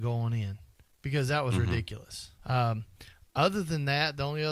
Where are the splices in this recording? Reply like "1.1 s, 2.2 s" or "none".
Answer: 2.4 s